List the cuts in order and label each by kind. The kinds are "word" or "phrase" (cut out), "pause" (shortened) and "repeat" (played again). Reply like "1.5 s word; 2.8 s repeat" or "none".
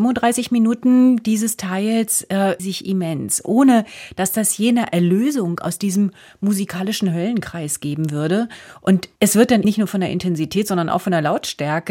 2.6 s phrase; 9.2 s pause; 9.6 s word